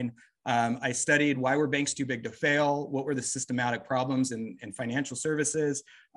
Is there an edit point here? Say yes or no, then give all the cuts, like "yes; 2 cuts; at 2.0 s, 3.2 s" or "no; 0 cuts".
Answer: no; 0 cuts